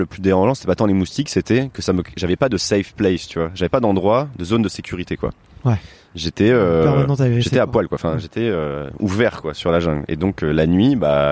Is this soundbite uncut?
yes; 0 cuts

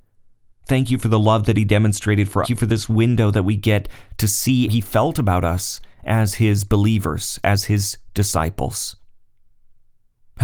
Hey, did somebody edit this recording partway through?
yes; 2 cuts; at 2.4 s, 4.7 s

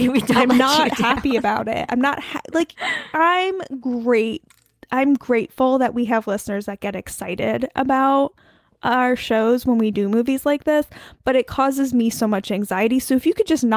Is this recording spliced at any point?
no; 0 cuts

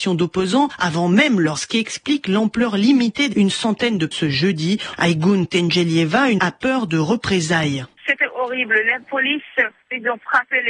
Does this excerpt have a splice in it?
yes; 4 cuts; at 1.6 s, 3.3 s, 4.1 s, 6.4 s

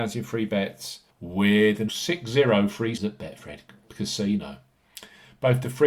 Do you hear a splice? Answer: yes; 3 cuts; at 1.1 s, 1.9 s, 3.0 s

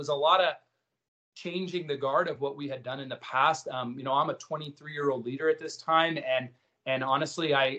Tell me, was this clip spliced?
no; 0 cuts

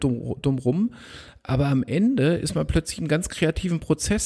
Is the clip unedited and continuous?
yes; 0 cuts

